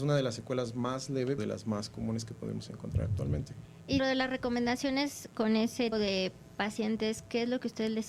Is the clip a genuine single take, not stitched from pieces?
no; 3 cuts; at 1.4 s, 4.0 s, 5.9 s

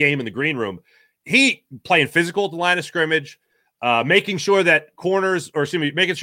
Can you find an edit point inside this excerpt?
no; 0 cuts

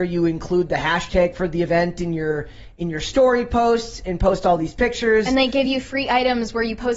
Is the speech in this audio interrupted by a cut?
no; 0 cuts

